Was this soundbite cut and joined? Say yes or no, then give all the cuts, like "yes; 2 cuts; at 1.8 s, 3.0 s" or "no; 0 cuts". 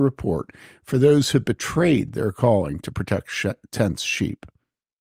no; 0 cuts